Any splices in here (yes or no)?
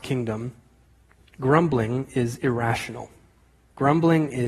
no